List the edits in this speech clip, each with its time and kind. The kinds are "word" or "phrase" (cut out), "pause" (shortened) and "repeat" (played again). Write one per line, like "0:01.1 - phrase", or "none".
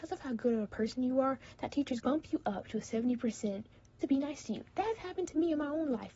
0:02.0 - word
0:04.0 - word